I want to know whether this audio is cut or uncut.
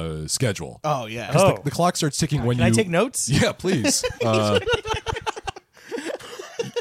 uncut